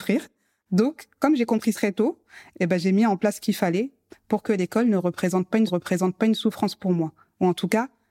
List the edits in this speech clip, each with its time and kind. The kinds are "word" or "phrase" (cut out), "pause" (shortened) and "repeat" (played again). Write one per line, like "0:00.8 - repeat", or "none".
0:01.7 - word
0:05.7 - repeat

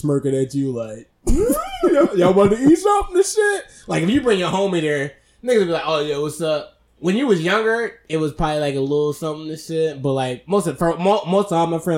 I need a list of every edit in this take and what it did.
none

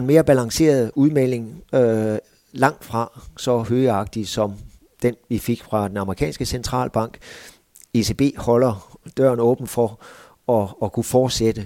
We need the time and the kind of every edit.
none

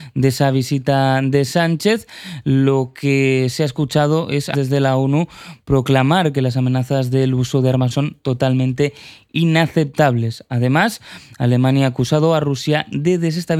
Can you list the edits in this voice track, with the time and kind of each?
0:04.5 - word
0:07.9 - word

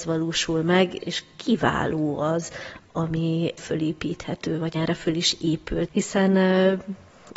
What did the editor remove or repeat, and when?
0:01.0 - word
0:03.6 - word
0:04.8 - word
0:05.9 - word

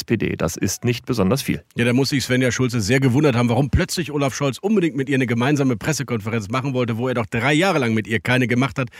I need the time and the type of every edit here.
0:01.7 - pause

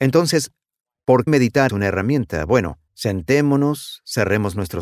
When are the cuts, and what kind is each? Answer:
0:01.3 - word
0:01.7 - word
0:02.9 - pause

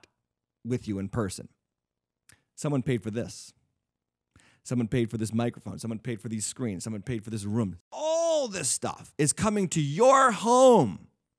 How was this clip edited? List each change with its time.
none

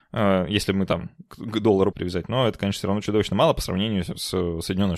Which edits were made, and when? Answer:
0:01.9 - phrase

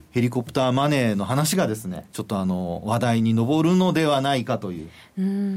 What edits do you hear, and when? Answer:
0:02.1 - phrase

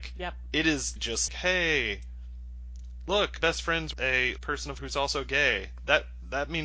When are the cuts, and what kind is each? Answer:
0:01.0 - word
0:01.3 - word
0:03.4 - word
0:03.9 - word
0:04.4 - word
0:04.8 - word

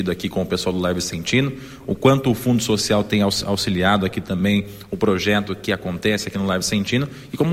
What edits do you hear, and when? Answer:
none

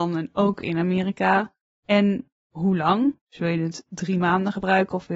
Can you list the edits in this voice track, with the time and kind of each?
0:02.4 - pause

